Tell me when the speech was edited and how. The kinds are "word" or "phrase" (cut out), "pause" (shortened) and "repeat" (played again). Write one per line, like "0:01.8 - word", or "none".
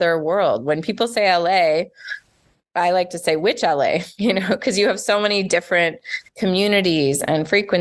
0:06.3 - pause

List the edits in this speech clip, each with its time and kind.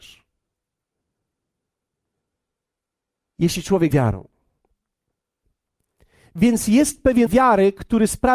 0:03.9 - word
0:07.3 - word

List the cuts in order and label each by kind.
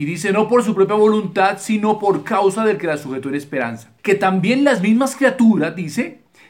0:04.0 - pause

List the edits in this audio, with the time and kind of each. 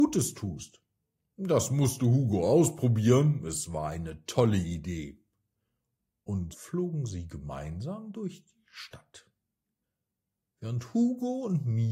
0:06.5 - word

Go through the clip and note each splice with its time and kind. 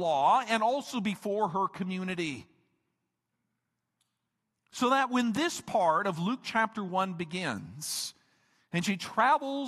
none

